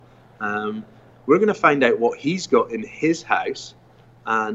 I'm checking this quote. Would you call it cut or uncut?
uncut